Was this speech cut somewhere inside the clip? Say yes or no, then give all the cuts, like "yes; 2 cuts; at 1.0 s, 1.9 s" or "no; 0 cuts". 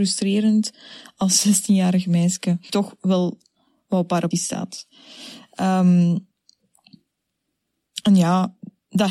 yes; 2 cuts; at 2.7 s, 4.3 s